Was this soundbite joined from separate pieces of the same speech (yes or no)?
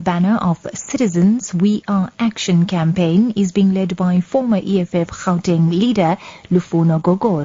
no